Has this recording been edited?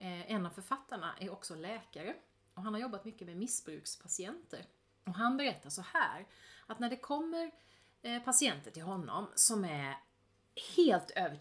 no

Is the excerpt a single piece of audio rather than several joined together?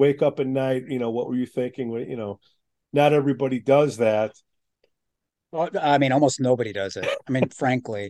yes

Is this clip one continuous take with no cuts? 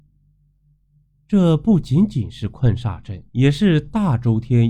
no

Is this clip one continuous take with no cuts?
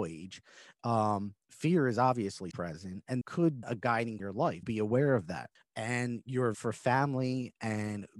no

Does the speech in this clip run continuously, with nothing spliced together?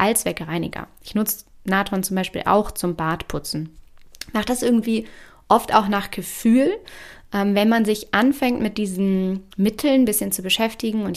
no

